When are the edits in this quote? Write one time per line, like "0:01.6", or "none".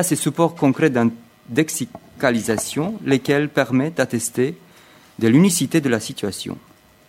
none